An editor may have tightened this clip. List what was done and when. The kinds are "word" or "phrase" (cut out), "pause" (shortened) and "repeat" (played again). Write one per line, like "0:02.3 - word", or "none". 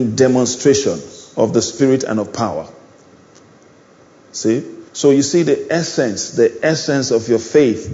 0:04.9 - pause